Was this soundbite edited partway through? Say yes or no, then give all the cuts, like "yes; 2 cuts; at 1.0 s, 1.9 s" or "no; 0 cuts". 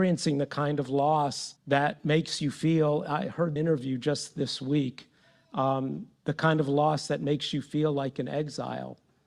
yes; 3 cuts; at 1.6 s, 3.6 s, 6.2 s